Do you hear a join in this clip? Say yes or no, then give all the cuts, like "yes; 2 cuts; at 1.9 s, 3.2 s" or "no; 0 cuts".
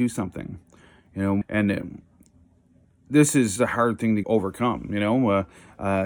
yes; 3 cuts; at 1.4 s, 3.6 s, 4.2 s